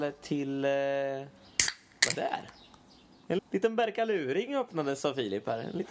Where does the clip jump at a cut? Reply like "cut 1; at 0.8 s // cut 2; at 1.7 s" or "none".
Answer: cut 1; at 2.1 s // cut 2; at 3.4 s